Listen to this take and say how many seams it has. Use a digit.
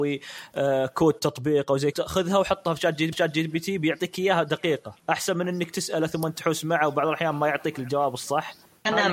3